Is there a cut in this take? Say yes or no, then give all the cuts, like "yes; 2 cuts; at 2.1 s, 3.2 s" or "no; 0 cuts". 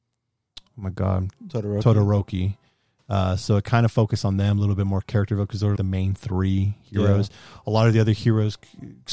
yes; 1 cut; at 5.8 s